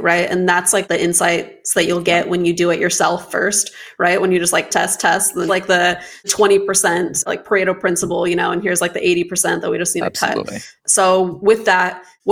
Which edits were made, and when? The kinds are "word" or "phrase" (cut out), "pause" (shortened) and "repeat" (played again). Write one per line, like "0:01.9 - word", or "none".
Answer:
0:05.5 - phrase
0:10.8 - pause